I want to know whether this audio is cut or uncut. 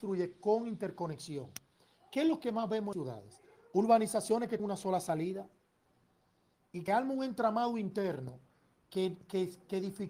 cut